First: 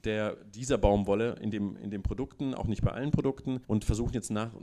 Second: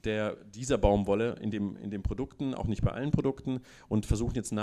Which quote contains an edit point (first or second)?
first